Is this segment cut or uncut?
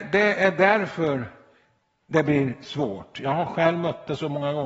uncut